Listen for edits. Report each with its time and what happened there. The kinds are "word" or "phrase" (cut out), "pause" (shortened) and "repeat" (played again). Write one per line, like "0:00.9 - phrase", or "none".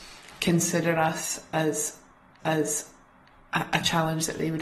0:02.4 - repeat